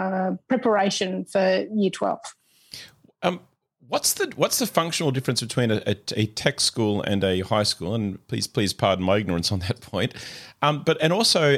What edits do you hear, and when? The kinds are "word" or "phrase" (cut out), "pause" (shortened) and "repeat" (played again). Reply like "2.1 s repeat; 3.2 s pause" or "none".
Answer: none